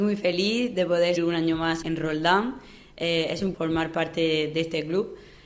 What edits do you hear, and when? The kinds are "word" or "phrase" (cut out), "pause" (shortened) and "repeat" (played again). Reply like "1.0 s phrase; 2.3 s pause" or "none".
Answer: 1.2 s word; 1.8 s word; 3.5 s word